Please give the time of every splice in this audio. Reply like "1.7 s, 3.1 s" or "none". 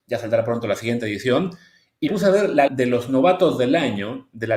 2.1 s, 2.7 s